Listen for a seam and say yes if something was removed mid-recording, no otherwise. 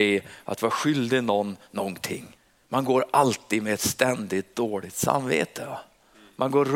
yes